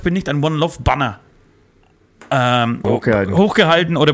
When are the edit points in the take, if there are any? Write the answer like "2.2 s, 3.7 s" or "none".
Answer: 2.8 s

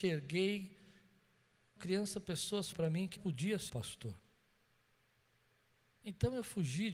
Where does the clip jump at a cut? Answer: 1.8 s, 2.7 s, 3.2 s, 3.7 s

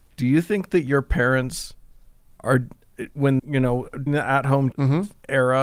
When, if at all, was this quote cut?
3.4 s, 4.1 s, 4.7 s

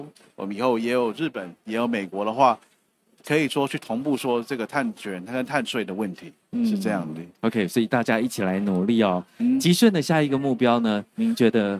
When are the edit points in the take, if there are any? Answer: none

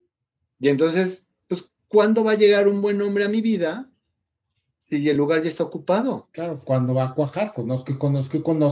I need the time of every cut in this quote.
none

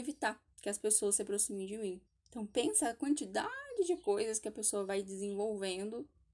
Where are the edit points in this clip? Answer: 2.1 s

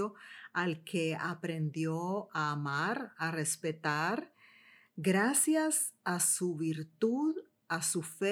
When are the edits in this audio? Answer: none

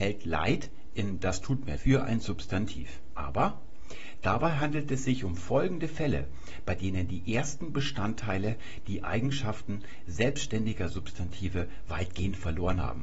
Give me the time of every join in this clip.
1.8 s

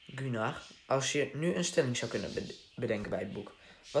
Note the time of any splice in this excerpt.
none

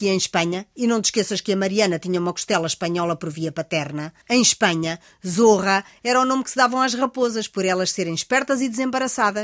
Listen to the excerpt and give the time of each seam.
4.2 s

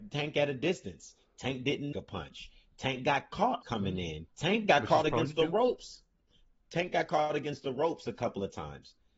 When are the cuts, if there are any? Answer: 1.9 s, 3.6 s, 4.3 s

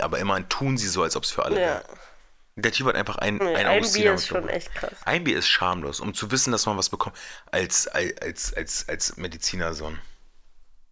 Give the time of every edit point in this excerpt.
none

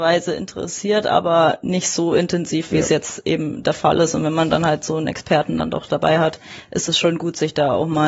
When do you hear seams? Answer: none

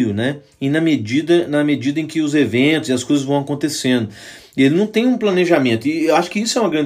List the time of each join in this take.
none

